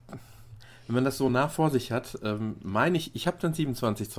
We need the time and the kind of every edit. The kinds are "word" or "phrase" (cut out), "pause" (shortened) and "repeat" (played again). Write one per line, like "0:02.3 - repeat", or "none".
none